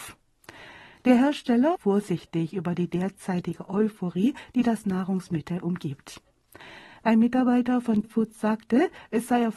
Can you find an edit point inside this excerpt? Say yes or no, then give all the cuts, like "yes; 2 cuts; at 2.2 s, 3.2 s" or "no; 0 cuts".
yes; 2 cuts; at 1.8 s, 8.0 s